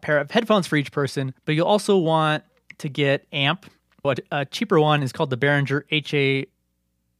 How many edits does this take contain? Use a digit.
3